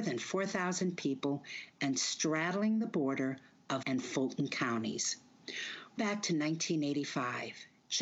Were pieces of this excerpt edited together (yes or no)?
yes